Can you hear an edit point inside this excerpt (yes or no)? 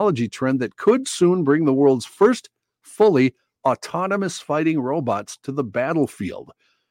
no